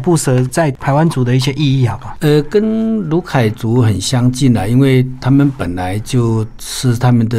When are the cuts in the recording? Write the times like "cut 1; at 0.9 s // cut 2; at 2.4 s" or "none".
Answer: none